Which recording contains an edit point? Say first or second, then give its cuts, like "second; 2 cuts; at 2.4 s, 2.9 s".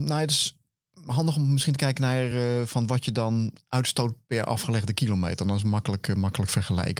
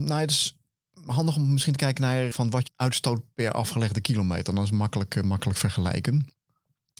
second; 2 cuts; at 2.3 s, 2.7 s